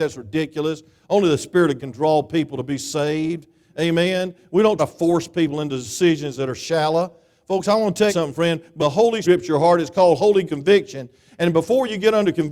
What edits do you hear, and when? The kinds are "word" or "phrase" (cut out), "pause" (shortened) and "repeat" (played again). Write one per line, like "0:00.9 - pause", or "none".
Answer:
0:01.8 - word
0:04.8 - word
0:08.1 - word
0:08.8 - word
0:09.2 - word
0:10.5 - word